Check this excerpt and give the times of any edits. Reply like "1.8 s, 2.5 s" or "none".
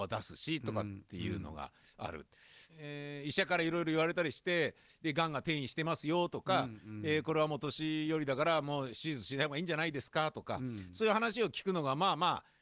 2.7 s